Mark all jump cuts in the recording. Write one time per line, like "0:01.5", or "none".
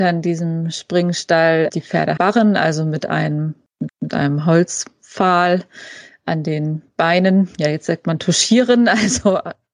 0:01.7
0:02.2
0:03.9